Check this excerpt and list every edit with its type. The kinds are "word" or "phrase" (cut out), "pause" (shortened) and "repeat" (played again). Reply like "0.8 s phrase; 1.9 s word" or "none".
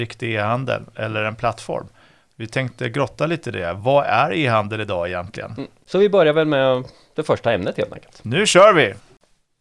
none